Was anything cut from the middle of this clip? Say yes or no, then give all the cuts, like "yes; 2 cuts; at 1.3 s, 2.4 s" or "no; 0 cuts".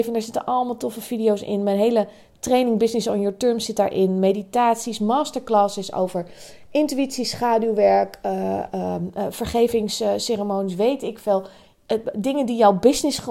no; 0 cuts